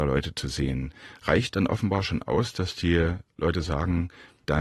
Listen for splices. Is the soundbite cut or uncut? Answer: uncut